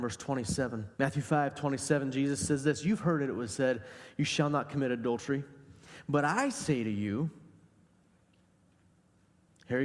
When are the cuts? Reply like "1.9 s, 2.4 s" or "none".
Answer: 0.9 s

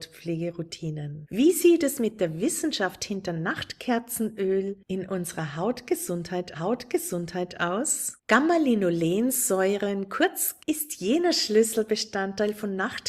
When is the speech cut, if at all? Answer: 6.5 s, 10.6 s

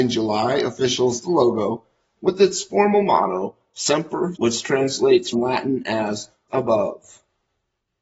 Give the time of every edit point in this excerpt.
1.2 s, 2.2 s, 4.3 s, 5.3 s, 6.5 s

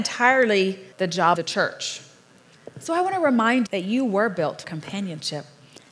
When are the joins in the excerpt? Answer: 0.9 s, 1.3 s, 3.7 s, 4.6 s

